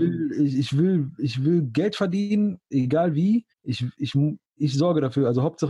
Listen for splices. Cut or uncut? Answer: cut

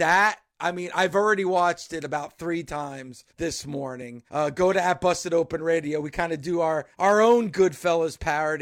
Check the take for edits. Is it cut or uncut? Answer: cut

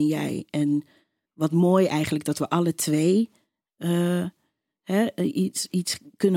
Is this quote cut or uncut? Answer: cut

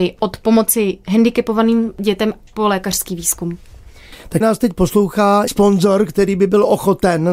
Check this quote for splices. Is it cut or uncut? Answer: cut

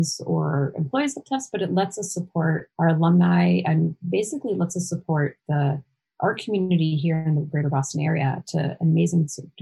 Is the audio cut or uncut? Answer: uncut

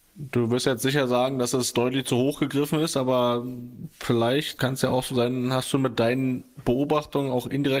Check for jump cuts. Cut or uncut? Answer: uncut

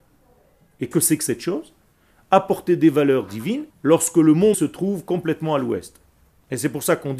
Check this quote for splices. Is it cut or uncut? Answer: cut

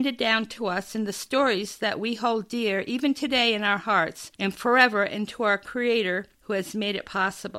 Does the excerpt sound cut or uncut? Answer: cut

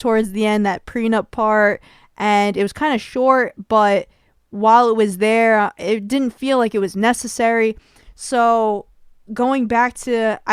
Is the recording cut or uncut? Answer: uncut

